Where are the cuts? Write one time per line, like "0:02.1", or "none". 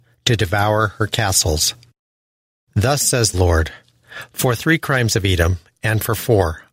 0:03.3